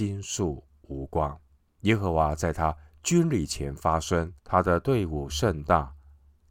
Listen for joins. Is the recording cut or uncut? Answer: cut